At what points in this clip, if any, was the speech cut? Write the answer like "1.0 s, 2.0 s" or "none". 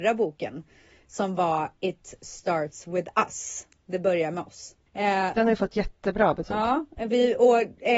4.9 s